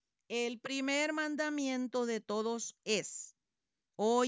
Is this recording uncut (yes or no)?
yes